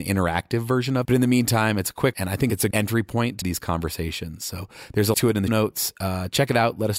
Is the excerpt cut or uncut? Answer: cut